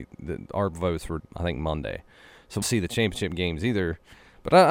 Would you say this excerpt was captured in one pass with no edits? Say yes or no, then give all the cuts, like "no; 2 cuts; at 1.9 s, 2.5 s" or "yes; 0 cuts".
no; 2 cuts; at 1.2 s, 2.6 s